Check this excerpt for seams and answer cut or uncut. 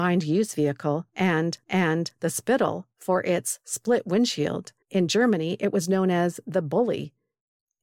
cut